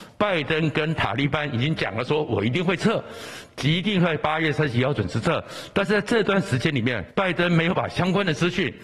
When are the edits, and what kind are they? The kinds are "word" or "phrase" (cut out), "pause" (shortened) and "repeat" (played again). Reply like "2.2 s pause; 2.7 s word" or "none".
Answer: 7.1 s pause